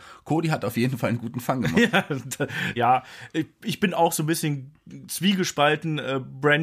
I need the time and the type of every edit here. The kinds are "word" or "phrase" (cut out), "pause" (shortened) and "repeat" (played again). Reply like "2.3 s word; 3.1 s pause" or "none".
2.8 s phrase